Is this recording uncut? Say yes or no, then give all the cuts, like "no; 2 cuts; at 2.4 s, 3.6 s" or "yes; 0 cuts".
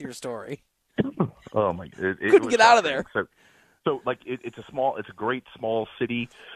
yes; 0 cuts